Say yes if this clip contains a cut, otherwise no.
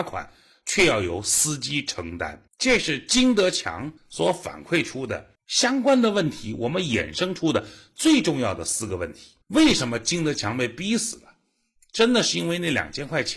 yes